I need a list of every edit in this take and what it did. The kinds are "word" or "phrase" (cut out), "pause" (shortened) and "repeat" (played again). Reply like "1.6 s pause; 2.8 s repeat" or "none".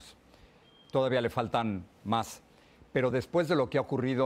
none